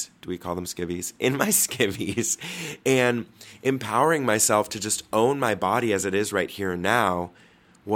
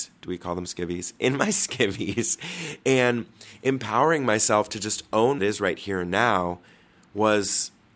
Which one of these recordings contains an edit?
second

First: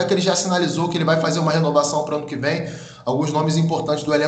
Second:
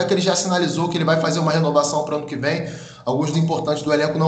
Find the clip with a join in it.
second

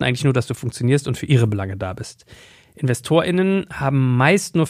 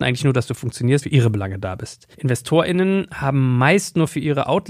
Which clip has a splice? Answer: second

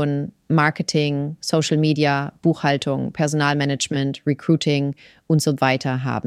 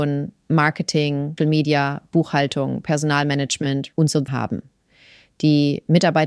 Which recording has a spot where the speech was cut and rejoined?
second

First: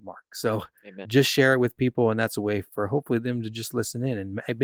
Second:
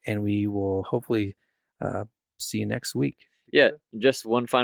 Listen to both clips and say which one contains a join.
first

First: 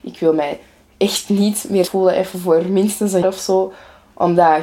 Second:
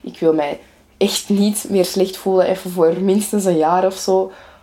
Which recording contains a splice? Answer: first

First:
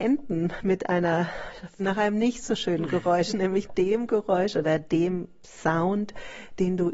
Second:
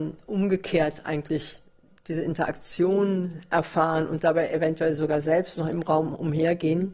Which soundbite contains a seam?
first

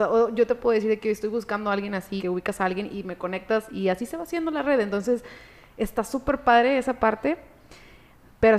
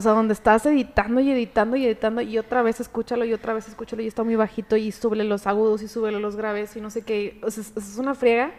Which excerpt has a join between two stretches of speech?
first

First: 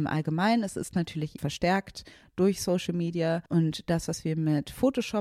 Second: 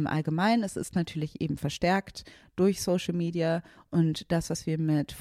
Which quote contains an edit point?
first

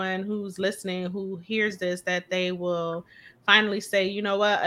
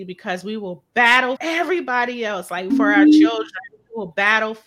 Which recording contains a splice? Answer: second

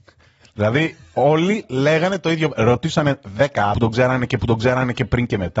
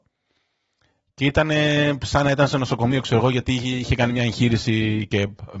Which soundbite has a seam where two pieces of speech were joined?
first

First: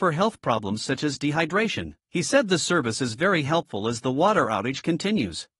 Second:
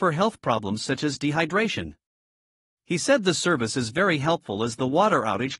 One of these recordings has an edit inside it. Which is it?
first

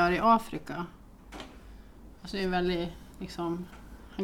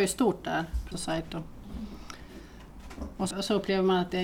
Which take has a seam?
second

